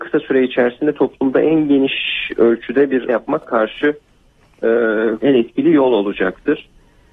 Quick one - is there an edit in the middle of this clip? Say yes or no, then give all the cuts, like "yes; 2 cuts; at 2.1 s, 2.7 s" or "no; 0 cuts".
yes; 3 cuts; at 3.1 s, 3.4 s, 5.2 s